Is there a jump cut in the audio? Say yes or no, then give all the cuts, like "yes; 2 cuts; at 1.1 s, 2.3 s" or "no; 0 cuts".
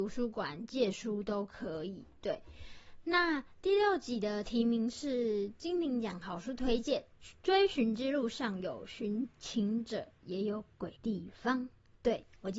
yes; 2 cuts; at 7.1 s, 11.0 s